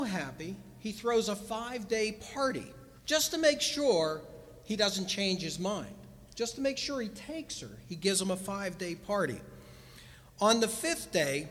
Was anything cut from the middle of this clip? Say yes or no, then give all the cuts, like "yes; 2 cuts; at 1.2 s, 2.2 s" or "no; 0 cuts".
yes; 1 cut; at 3.0 s